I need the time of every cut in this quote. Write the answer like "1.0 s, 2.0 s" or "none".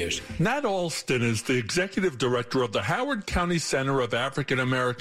none

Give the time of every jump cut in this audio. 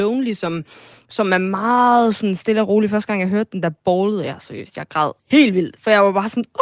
5.2 s

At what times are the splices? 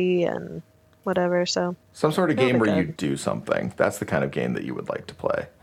3.0 s

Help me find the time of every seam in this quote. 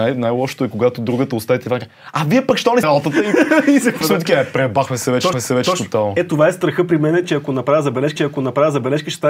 2.8 s, 4.0 s, 5.3 s, 8.2 s

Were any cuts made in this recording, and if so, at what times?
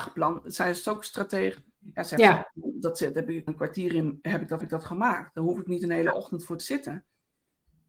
1.7 s, 2.5 s, 3.5 s, 4.6 s, 6.6 s

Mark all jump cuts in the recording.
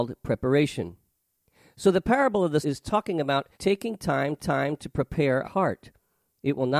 2.6 s, 3.5 s, 4.4 s, 5.4 s

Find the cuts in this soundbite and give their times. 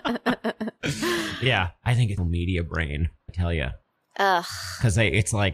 2.2 s, 3.3 s

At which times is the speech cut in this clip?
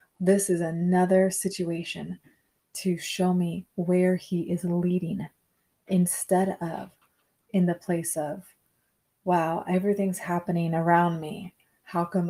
7.4 s

